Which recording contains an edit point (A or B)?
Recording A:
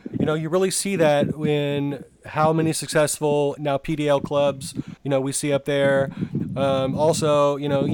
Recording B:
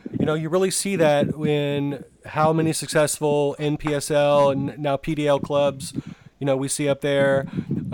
A